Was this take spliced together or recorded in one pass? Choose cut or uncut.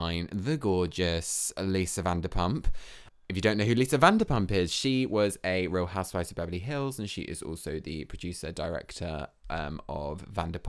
uncut